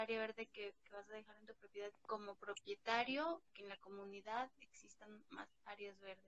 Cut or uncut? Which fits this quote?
cut